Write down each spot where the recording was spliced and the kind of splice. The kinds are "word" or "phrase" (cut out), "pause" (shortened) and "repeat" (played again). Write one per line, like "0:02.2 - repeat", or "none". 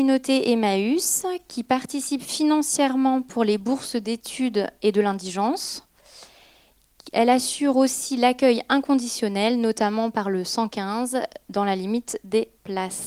none

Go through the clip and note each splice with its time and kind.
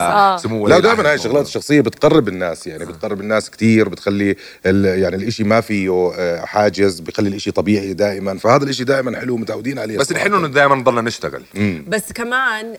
none

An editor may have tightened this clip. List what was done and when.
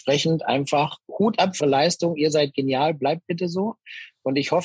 0:01.6 - word

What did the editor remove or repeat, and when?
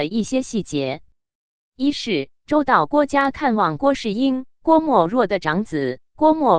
none

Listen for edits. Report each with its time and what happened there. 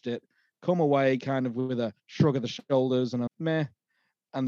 0:03.3 - word

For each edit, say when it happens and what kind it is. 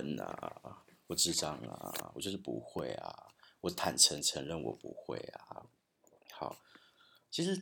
0:05.8 - pause

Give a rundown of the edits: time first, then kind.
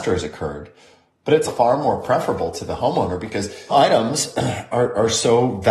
0:01.5 - word
0:03.7 - word

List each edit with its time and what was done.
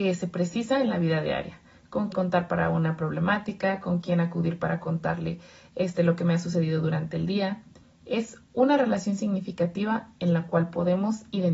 0:02.1 - word

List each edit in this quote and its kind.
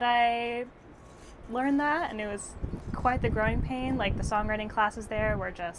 none

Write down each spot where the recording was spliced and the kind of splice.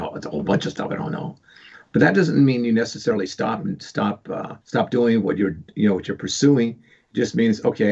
0:04.6 - pause

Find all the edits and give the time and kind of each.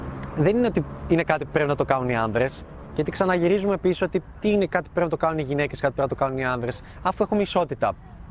none

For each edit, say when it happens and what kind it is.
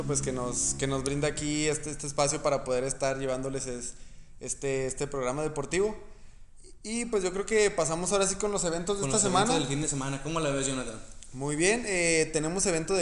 none

